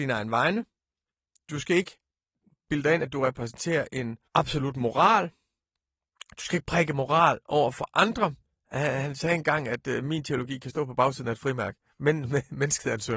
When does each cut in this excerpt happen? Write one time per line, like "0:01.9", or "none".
0:04.3